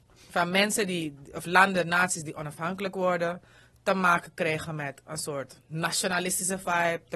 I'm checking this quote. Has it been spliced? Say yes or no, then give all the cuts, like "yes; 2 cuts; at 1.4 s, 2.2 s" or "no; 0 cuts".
no; 0 cuts